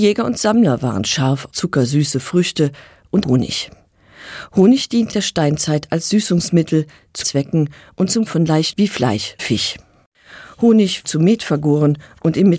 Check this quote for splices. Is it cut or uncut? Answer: cut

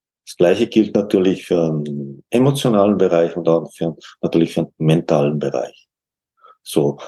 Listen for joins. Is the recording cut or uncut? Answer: uncut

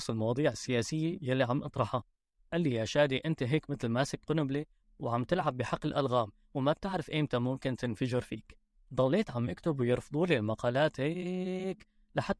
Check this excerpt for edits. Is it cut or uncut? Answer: uncut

